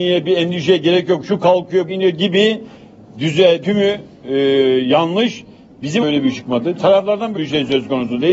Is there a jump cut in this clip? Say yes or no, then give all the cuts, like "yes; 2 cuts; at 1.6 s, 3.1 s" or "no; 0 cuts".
yes; 5 cuts; at 1.9 s, 3.6 s, 6.0 s, 6.3 s, 7.3 s